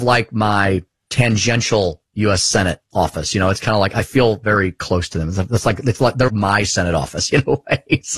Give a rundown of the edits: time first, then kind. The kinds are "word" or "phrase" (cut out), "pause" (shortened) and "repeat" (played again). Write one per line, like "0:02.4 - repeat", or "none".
0:06.3 - word